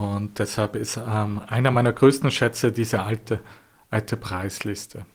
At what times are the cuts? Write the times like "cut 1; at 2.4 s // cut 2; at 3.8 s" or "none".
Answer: none